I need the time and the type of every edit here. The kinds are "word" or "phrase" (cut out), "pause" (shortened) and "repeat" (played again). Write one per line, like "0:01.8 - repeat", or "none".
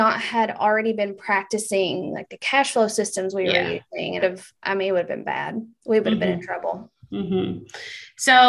0:04.2 - phrase